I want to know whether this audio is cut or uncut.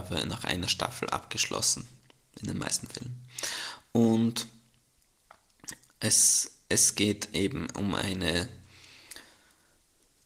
uncut